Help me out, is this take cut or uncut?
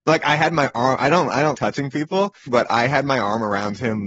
cut